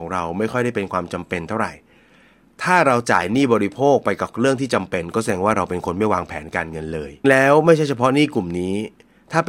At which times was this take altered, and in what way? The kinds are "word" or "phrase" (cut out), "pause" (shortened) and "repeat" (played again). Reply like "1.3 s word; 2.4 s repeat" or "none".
7.2 s phrase